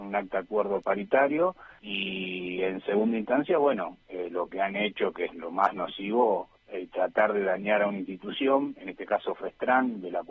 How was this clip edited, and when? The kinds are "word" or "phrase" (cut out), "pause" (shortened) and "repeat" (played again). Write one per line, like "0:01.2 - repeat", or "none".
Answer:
0:01.8 - pause
0:06.6 - pause

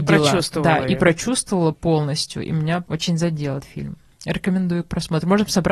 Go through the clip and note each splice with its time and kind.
0:01.7 - word
0:02.8 - word
0:03.6 - word

